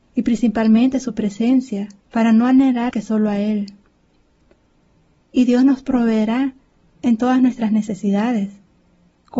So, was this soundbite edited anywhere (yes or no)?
yes